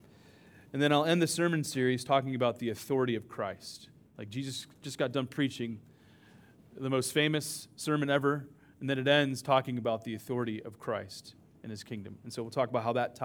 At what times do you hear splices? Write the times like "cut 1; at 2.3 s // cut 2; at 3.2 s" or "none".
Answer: none

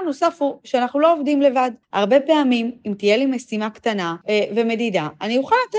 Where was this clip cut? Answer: cut 1; at 1.8 s // cut 2; at 4.2 s

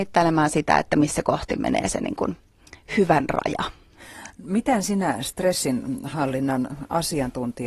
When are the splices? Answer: none

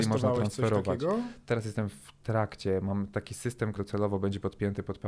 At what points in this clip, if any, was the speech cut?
cut 1; at 3.7 s

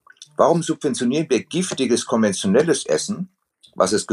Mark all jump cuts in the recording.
none

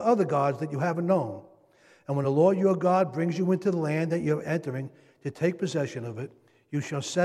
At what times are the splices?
none

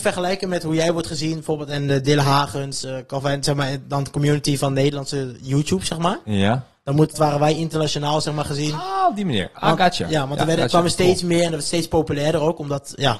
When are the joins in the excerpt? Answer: cut 1; at 7.1 s

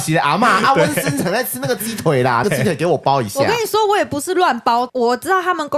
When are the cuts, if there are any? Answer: cut 1; at 2.4 s

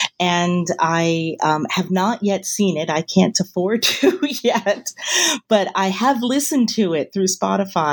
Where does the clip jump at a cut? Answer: none

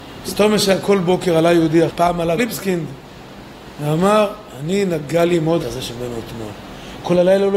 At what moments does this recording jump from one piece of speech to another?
cut 1; at 1.9 s // cut 2; at 2.4 s // cut 3; at 5.6 s // cut 4; at 5.9 s

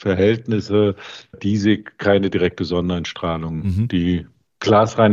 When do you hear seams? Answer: cut 1; at 1.3 s

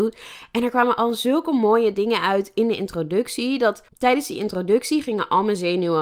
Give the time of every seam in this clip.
cut 1; at 3.9 s

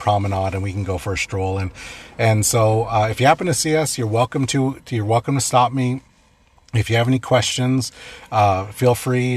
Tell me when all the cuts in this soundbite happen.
none

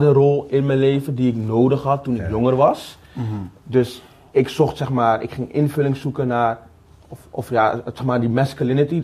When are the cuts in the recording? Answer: none

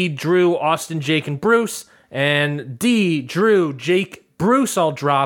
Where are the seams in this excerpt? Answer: none

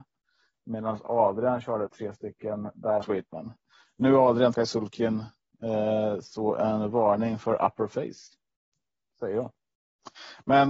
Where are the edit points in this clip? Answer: cut 1; at 1.9 s // cut 2; at 3.0 s // cut 3; at 4.5 s

